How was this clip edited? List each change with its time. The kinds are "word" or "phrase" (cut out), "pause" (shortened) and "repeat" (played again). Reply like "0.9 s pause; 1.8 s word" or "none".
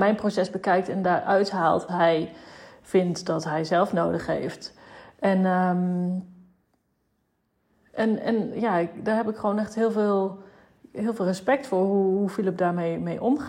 1.9 s word